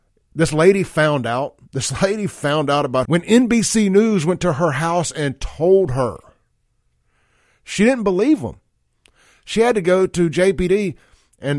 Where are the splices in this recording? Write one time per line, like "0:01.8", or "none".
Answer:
0:01.6
0:03.0